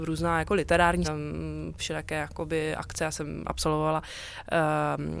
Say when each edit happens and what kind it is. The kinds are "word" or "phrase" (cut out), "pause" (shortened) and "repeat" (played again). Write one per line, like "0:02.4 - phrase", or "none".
0:01.0 - word
0:01.8 - word
0:03.4 - word